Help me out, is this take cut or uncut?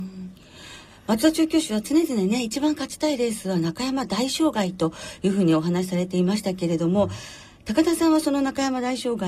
uncut